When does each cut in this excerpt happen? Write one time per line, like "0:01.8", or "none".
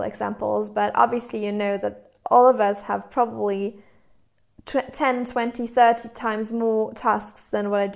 none